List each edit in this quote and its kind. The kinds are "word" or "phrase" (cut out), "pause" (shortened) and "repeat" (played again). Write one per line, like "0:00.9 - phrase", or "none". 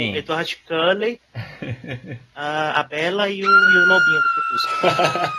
0:01.3 - pause